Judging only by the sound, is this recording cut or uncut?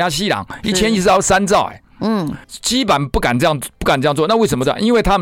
cut